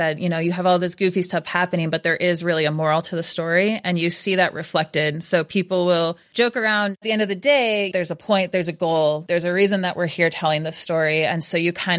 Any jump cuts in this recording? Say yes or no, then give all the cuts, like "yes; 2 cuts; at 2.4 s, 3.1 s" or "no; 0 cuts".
yes; 1 cut; at 7.0 s